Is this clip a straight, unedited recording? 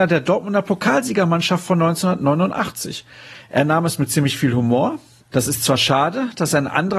yes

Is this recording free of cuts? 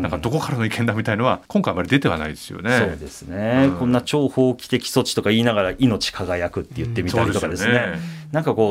no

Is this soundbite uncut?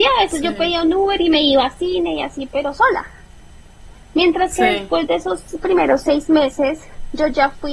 yes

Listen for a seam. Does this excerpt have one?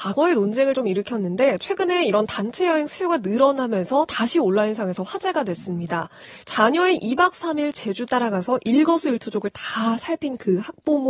yes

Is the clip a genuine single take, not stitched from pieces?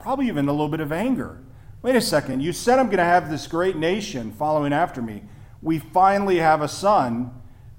yes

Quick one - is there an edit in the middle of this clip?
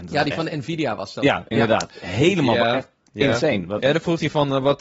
no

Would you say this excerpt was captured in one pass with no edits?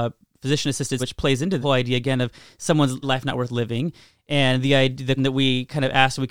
no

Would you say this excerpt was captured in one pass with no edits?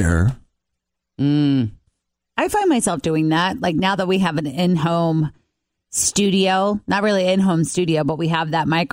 no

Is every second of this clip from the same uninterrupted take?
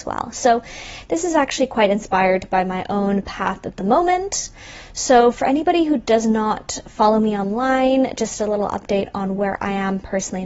yes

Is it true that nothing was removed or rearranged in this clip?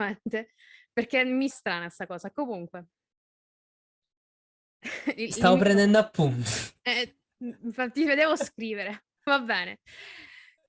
no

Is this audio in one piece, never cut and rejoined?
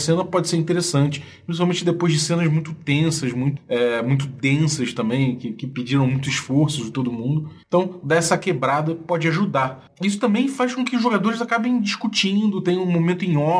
no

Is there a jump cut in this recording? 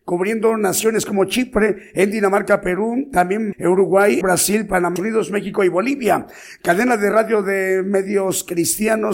yes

